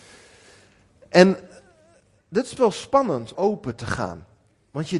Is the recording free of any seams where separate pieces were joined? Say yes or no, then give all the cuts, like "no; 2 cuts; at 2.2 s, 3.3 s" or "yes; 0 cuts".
no; 2 cuts; at 2.6 s, 3.3 s